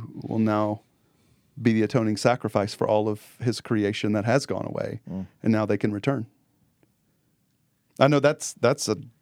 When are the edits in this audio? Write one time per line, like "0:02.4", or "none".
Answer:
none

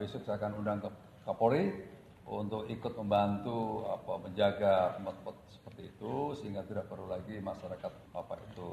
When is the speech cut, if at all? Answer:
none

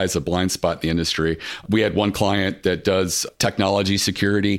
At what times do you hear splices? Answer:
none

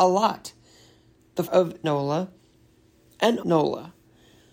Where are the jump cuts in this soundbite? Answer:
0:01.5
0:01.8
0:03.4

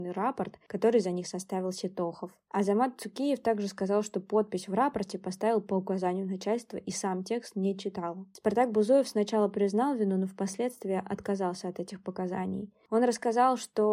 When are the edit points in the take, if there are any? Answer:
none

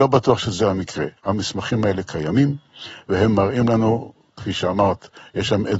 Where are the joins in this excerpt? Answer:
0:01.2

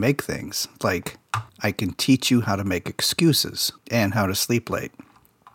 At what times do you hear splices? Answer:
0:01.5
0:03.8

